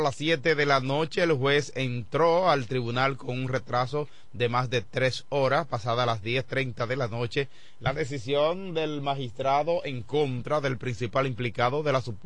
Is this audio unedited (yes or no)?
yes